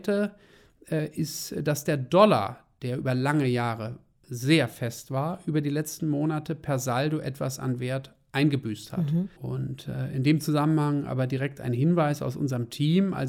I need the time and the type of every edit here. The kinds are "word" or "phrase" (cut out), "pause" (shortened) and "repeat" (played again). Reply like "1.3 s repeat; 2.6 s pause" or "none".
9.4 s pause